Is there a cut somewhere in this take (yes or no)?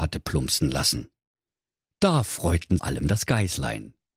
yes